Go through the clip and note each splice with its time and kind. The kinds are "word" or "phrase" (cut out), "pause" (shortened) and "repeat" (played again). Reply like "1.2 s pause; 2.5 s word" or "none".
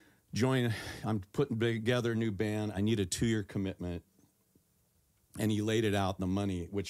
none